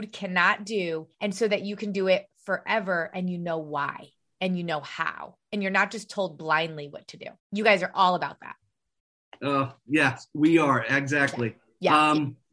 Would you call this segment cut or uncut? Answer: cut